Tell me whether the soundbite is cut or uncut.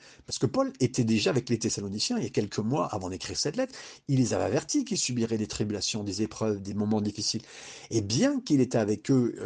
uncut